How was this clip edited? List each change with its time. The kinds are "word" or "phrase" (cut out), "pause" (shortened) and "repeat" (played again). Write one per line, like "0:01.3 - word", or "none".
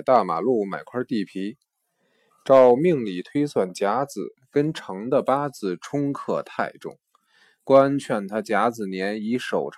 none